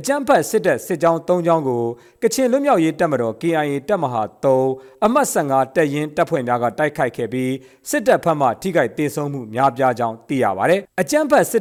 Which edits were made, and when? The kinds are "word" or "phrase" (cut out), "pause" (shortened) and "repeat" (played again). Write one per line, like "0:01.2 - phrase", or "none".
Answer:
none